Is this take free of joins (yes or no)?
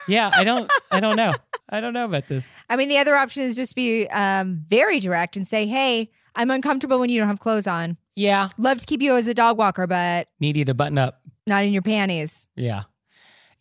no